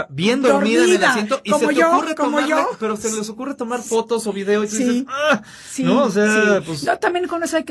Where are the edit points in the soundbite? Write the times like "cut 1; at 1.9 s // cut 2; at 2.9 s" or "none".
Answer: none